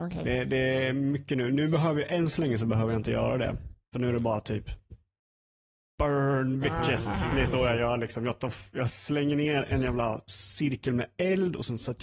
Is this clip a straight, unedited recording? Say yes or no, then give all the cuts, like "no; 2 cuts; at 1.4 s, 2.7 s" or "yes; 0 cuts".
yes; 0 cuts